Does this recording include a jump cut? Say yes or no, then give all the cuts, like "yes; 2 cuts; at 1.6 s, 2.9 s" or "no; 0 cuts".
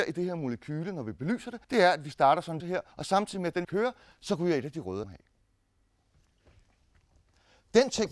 yes; 5 cuts; at 1.6 s, 2.6 s, 2.9 s, 3.6 s, 5.0 s